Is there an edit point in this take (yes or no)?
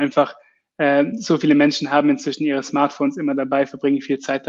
no